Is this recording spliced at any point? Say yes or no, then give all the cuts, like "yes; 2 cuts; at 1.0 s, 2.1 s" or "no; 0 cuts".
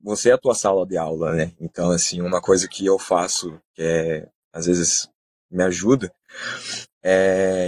no; 0 cuts